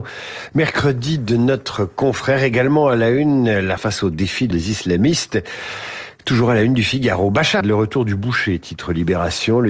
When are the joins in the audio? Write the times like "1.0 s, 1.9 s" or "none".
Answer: 3.8 s, 4.5 s, 7.6 s